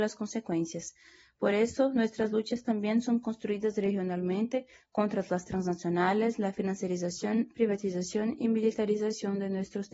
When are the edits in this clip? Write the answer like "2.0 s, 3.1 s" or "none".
none